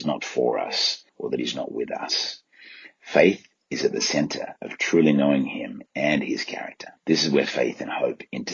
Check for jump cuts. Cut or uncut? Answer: cut